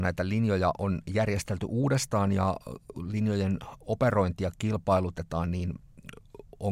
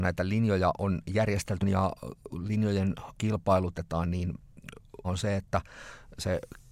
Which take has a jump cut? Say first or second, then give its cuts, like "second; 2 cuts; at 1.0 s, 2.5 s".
second; 3 cuts; at 1.6 s, 3.1 s, 5.0 s